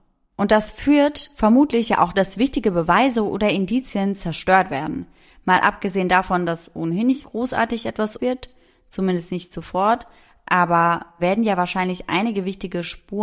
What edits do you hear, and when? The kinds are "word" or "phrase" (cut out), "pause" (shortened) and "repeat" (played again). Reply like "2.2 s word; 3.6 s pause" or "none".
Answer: 2.1 s word; 7.2 s word; 8.2 s word; 11.2 s word

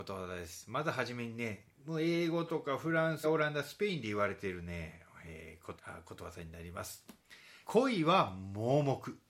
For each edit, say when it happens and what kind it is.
3.2 s phrase; 5.8 s phrase; 7.6 s pause

